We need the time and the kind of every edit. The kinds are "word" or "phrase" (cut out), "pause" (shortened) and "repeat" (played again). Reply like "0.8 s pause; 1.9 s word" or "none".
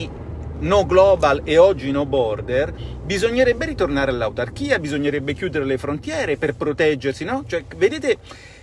none